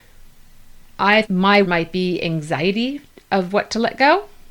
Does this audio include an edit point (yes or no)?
yes